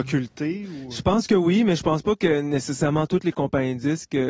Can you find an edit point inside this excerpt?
no; 0 cuts

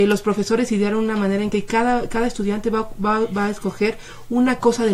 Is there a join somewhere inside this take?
no; 0 cuts

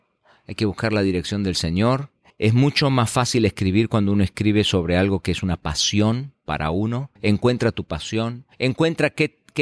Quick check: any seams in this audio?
yes; 3 cuts; at 2.3 s, 7.2 s, 8.5 s

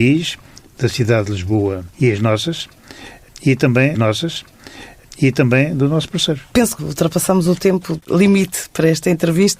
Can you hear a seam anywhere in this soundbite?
yes; 4 cuts; at 1.9 s, 3.9 s, 6.5 s, 6.8 s

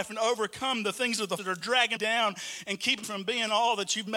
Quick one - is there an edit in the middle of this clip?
yes; 3 cuts; at 1.4 s, 2.0 s, 3.0 s

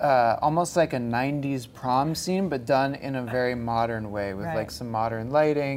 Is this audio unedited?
yes; 0 cuts

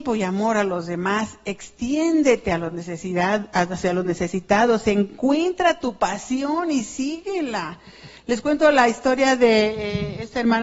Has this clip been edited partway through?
no; 0 cuts

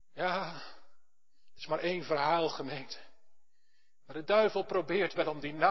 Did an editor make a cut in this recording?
no; 0 cuts

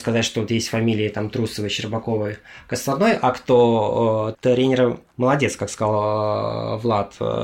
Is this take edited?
yes; 1 cut; at 4.3 s

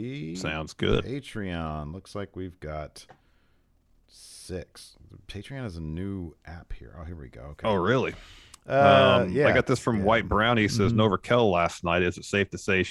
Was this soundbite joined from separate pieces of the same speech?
no; 0 cuts

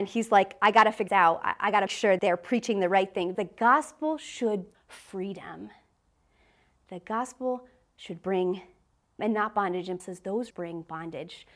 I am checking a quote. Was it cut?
yes; 8 cuts; at 1.1 s, 1.9 s, 2.2 s, 3.3 s, 4.7 s, 9.2 s, 10.0 s, 10.5 s

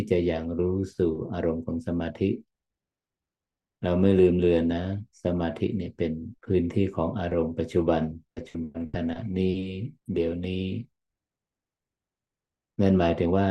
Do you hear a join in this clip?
yes; 3 cuts; at 6.4 s, 8.3 s, 10.0 s

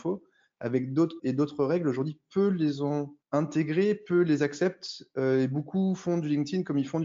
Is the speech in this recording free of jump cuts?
no; 2 cuts; at 1.2 s, 3.2 s

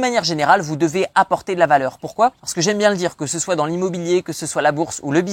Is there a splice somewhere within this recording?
yes; 1 cut; at 2.4 s

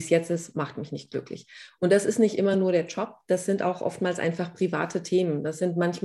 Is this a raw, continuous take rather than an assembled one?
yes; 0 cuts

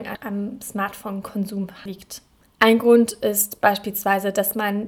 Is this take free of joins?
yes; 0 cuts

